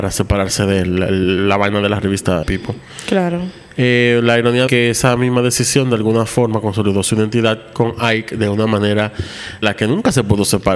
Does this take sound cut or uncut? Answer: cut